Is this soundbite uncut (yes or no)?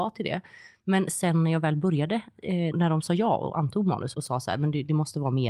no